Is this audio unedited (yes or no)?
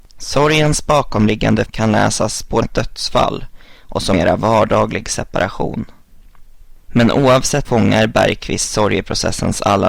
no